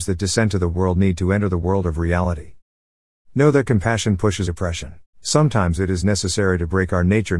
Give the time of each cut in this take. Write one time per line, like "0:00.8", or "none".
0:04.4
0:05.1